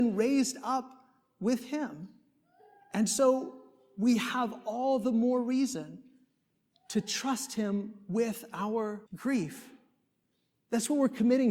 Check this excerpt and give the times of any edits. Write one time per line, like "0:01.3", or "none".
0:09.1